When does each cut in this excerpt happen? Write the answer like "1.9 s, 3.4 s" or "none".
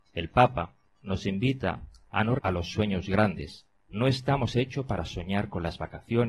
2.4 s, 3.7 s

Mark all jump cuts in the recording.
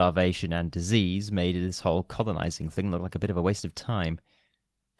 none

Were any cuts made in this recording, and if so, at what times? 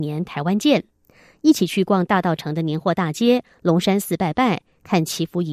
none

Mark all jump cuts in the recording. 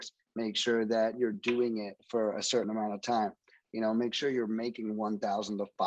none

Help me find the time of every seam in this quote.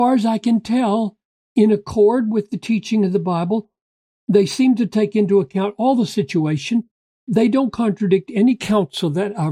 none

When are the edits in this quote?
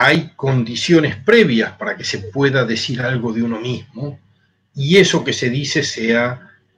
none

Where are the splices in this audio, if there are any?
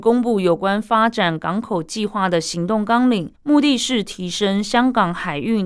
3.3 s

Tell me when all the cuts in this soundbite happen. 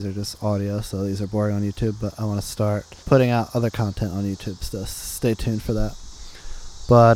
3.0 s

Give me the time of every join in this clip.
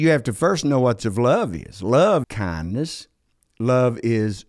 1.0 s, 2.2 s

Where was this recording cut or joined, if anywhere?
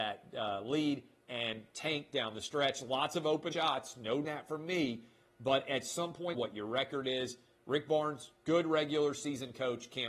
3.5 s, 4.2 s, 6.3 s

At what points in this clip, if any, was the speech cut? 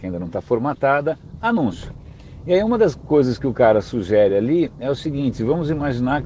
none

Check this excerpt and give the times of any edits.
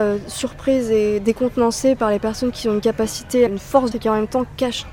3.5 s, 3.9 s

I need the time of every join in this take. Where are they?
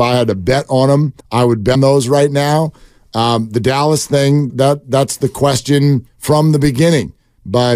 1.2 s, 1.7 s, 4.5 s, 6.1 s

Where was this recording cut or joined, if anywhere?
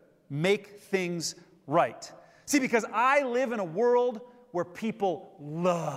none

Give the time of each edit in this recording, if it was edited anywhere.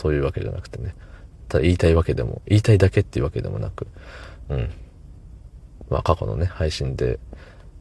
4.5 s

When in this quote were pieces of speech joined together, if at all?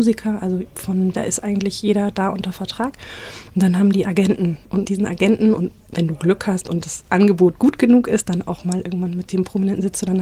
1.1 s, 4.0 s, 4.8 s, 5.8 s

